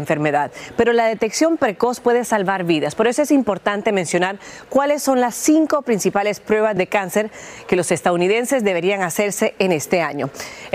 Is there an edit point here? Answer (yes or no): yes